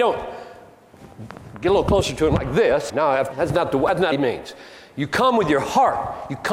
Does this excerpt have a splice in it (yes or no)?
yes